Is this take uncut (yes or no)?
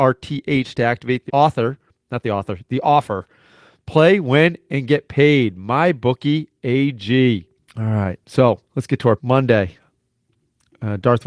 no